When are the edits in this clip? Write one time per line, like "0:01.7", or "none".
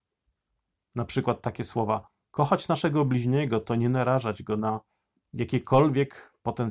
none